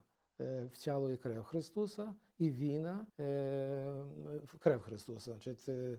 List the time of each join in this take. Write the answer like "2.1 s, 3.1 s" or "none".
3.1 s

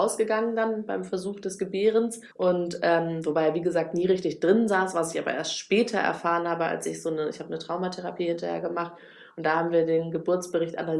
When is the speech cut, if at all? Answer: 2.3 s

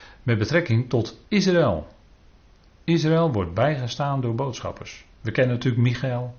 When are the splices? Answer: none

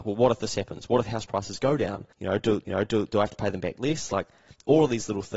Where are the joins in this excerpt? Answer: 2.1 s, 2.7 s

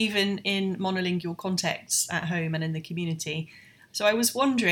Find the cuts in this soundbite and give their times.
none

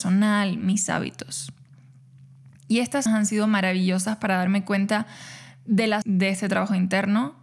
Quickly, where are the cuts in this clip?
3.1 s, 6.0 s

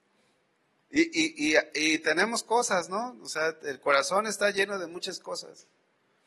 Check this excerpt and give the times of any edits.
none

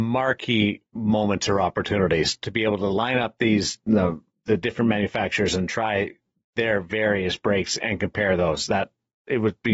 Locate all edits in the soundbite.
none

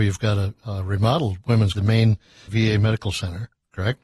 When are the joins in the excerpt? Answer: 1.7 s, 2.5 s

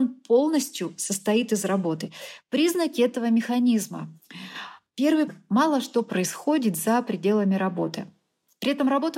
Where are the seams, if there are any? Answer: 5.3 s

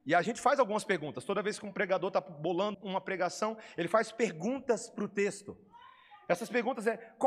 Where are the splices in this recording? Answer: 2.7 s

